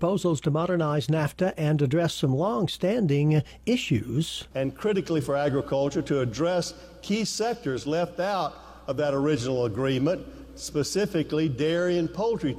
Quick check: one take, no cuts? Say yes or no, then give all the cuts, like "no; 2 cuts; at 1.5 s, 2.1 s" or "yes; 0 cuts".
no; 1 cut; at 4.5 s